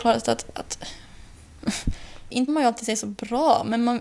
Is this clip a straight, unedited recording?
no; 1 cut; at 2.5 s

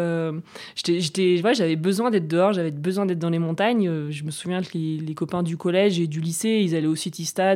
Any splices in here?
no; 0 cuts

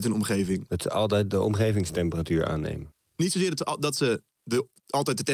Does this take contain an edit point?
no; 0 cuts

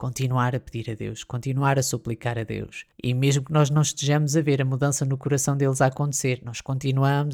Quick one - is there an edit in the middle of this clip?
yes; 1 cut; at 2.9 s

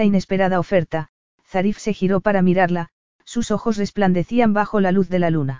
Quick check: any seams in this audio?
no; 0 cuts

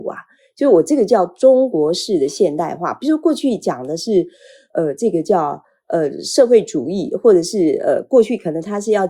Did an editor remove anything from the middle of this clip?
no; 0 cuts

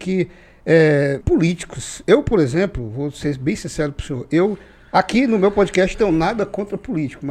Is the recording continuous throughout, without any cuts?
no; 2 cuts; at 1.2 s, 5.9 s

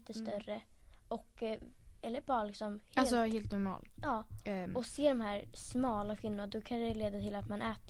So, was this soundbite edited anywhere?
no; 0 cuts

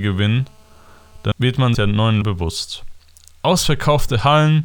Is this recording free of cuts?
no; 3 cuts; at 1.3 s, 1.7 s, 2.2 s

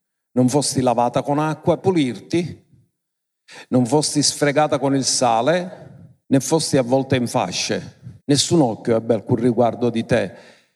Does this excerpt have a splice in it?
yes; 3 cuts; at 1.8 s, 6.2 s, 8.2 s

